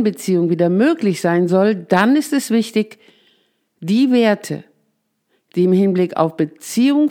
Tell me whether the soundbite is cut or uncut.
uncut